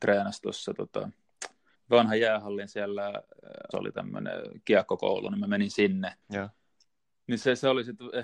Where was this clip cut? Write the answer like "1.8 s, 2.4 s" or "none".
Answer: 1.7 s, 3.7 s, 6.2 s